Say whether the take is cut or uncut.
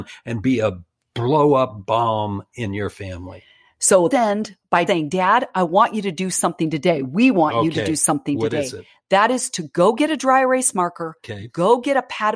cut